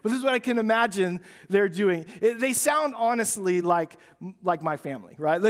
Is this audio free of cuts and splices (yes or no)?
yes